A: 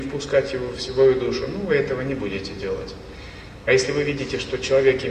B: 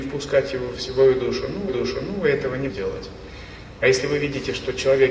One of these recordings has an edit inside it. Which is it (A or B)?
B